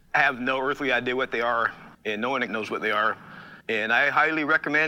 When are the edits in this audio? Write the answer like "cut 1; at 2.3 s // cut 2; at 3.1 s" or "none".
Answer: cut 1; at 1.9 s // cut 2; at 2.5 s // cut 3; at 3.6 s